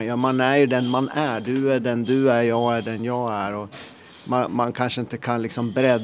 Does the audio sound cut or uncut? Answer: uncut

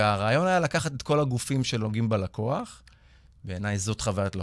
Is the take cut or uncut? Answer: uncut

